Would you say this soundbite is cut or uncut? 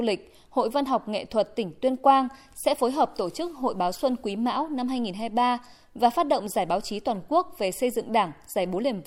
uncut